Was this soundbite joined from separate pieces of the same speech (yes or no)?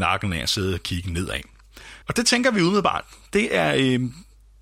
yes